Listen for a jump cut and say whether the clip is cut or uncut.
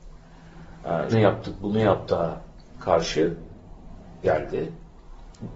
cut